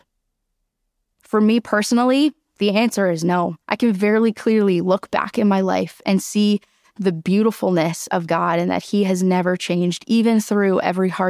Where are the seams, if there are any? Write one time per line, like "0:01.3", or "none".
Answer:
0:03.6